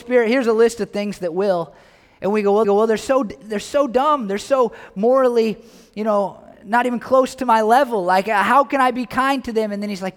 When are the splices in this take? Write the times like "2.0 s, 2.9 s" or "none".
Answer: 2.6 s